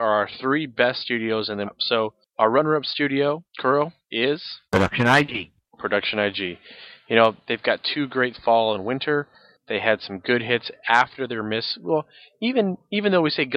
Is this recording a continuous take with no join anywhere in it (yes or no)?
no